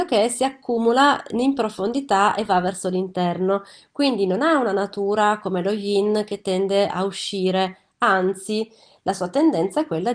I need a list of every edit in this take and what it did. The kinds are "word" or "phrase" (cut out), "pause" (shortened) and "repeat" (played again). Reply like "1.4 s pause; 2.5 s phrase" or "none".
none